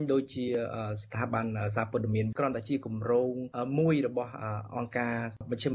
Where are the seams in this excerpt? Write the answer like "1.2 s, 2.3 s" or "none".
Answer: 2.3 s